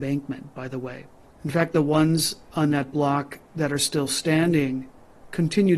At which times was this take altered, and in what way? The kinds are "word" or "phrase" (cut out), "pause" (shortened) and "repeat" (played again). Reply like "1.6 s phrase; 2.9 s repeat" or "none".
1.2 s pause; 3.4 s pause